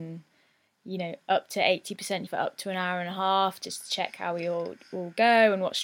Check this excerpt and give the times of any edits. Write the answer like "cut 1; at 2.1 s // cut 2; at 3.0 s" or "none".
cut 1; at 2.3 s